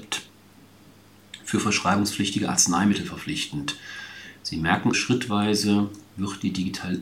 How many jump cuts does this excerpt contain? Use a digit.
1